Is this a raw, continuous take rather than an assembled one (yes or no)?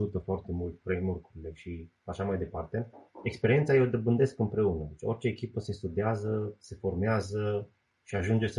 yes